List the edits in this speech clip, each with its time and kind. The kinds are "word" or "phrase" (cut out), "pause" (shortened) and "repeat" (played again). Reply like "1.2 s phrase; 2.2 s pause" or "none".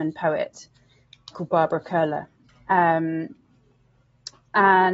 1.3 s word